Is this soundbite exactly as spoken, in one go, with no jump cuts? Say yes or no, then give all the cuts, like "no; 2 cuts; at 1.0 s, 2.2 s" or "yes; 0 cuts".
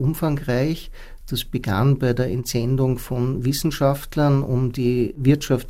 yes; 0 cuts